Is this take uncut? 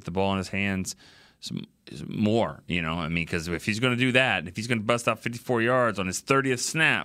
yes; 0 cuts

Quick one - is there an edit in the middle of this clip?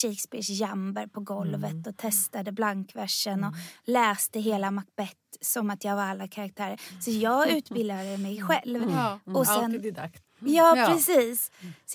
yes; 1 cut; at 10.3 s

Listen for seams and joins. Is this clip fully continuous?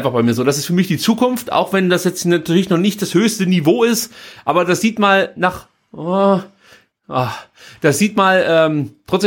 yes; 0 cuts

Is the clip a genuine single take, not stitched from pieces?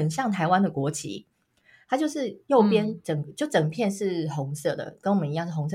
yes; 0 cuts

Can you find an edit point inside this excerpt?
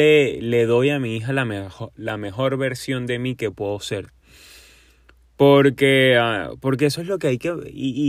no; 0 cuts

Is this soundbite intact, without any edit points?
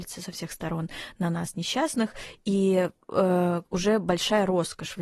yes; 0 cuts

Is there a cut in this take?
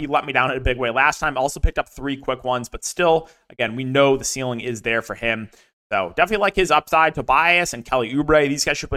no; 0 cuts

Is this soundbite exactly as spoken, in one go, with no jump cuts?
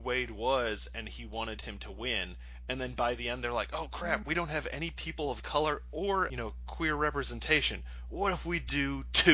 no; 1 cut; at 6.3 s

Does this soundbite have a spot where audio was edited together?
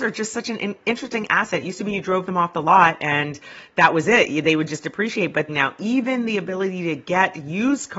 yes; 1 cut; at 5.5 s

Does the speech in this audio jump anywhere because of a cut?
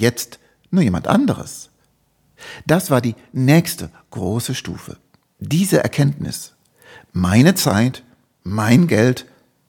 no; 0 cuts

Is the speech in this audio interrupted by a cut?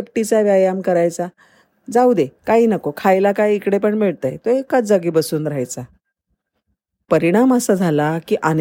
no; 0 cuts

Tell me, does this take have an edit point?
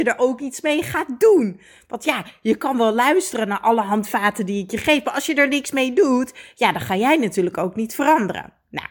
no; 0 cuts

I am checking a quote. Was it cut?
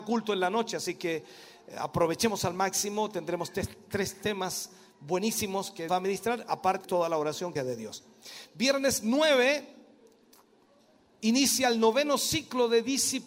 yes; 3 cuts; at 5.9 s, 6.8 s, 7.6 s

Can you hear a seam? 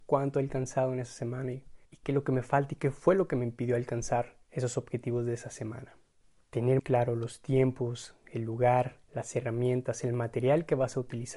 yes; 4 cuts; at 1.9 s, 4.4 s, 6.8 s, 9.0 s

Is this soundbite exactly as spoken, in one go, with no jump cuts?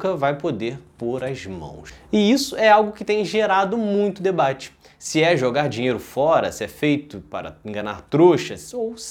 yes; 0 cuts

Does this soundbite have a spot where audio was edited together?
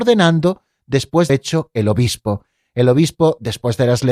yes; 1 cut; at 1.3 s

